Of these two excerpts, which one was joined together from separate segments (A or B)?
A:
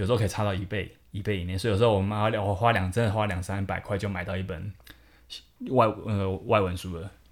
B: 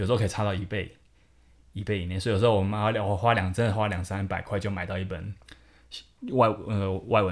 A